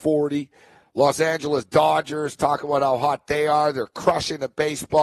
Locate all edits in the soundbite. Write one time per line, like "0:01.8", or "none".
none